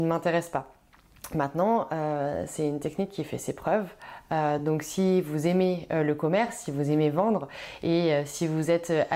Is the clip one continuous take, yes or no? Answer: yes